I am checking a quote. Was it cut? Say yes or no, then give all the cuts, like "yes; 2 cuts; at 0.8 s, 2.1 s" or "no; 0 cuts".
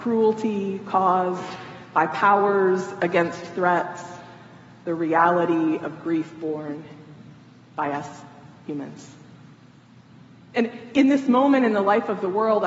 no; 0 cuts